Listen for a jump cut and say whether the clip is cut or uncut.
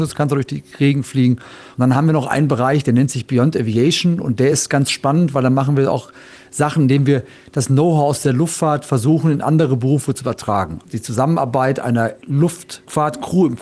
uncut